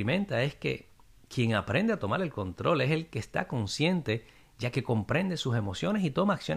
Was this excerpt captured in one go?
yes; 0 cuts

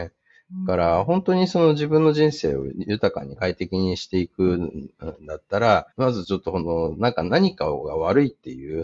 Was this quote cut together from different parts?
yes; 1 cut; at 5.9 s

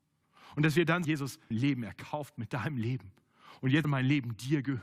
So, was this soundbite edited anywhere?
yes; 3 cuts; at 1.0 s, 1.5 s, 3.8 s

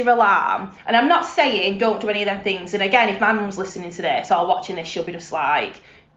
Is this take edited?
no; 0 cuts

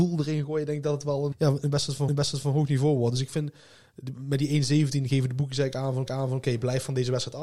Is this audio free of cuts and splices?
no; 3 cuts; at 1.3 s, 2.1 s, 6.1 s

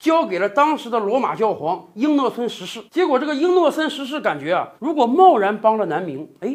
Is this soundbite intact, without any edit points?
no; 2 cuts; at 2.9 s, 4.8 s

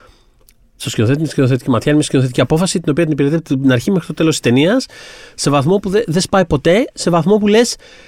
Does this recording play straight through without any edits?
yes; 0 cuts

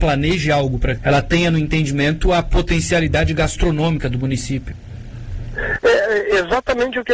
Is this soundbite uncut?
no; 1 cut; at 1.0 s

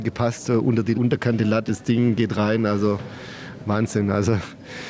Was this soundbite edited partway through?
yes; 3 cuts; at 0.9 s, 1.7 s, 3.6 s

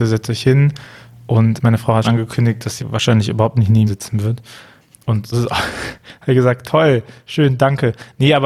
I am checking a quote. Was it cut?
yes; 5 cuts; at 1.6 s, 2.0 s, 2.8 s, 3.9 s, 5.3 s

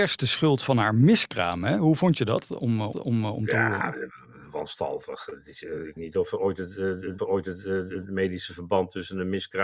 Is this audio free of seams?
no; 3 cuts; at 2.9 s, 6.0 s, 7.2 s

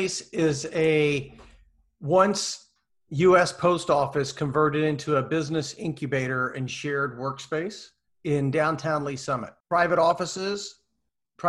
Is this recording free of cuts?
yes; 0 cuts

